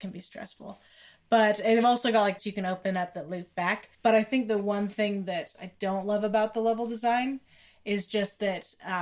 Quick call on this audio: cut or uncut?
cut